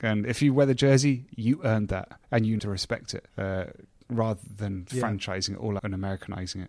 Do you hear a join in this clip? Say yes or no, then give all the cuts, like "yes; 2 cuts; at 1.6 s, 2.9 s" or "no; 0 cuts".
yes; 5 cuts; at 2.2 s, 2.6 s, 3.3 s, 4.9 s, 5.8 s